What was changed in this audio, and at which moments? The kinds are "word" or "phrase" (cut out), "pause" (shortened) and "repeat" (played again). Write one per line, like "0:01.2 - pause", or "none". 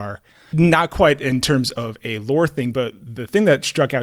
none